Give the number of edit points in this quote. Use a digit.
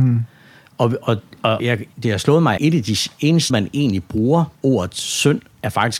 6